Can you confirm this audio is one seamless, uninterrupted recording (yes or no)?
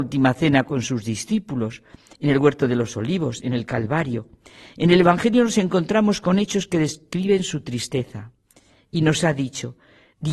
yes